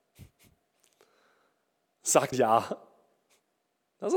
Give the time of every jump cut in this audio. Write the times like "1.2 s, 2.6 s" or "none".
2.3 s